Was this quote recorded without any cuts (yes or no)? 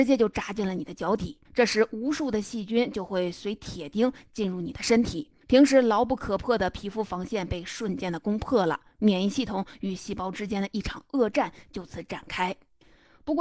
no